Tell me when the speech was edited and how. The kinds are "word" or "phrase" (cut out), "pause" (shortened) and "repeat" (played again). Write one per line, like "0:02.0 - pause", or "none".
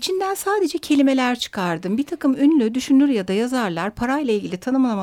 none